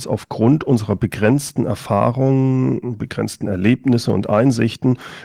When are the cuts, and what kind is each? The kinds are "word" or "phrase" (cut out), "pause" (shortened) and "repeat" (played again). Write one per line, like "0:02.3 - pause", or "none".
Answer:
none